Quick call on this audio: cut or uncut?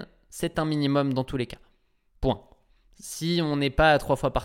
uncut